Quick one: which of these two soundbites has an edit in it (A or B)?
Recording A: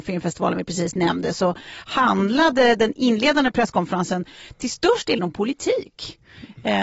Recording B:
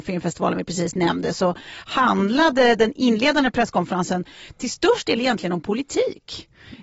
A